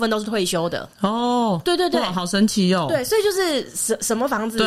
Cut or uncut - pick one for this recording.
cut